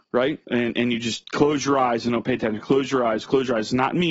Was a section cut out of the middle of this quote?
no; 0 cuts

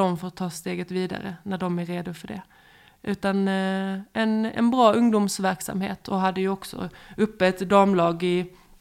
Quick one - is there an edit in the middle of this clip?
no; 0 cuts

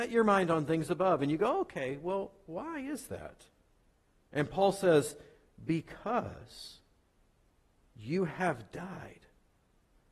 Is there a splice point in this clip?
no; 0 cuts

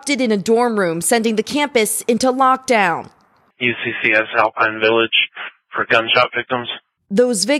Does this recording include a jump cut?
no; 0 cuts

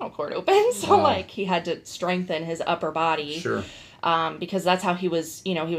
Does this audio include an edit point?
no; 0 cuts

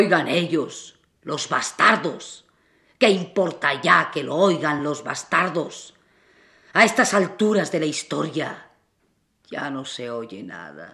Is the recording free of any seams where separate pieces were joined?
yes; 0 cuts

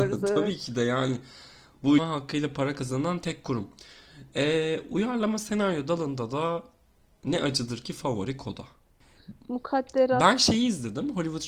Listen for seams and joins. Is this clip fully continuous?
no; 1 cut; at 2.0 s

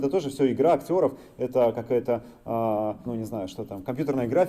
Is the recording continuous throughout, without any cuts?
no; 1 cut; at 3.1 s

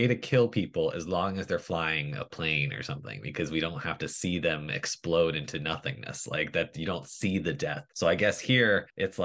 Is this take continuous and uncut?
yes; 0 cuts

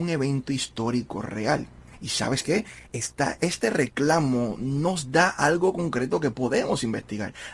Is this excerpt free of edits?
yes; 0 cuts

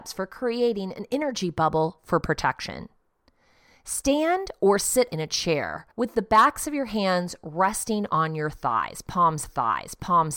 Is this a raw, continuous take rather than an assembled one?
no; 3 cuts; at 5.1 s, 5.9 s, 9.4 s

